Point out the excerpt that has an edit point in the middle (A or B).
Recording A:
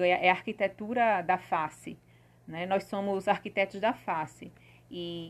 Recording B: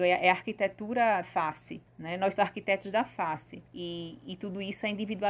B